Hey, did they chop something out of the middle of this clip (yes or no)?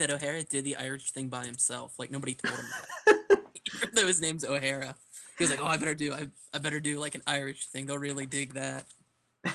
no